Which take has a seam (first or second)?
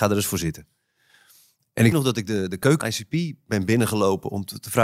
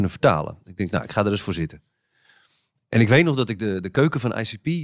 first